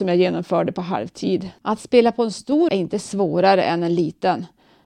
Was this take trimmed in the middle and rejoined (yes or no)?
yes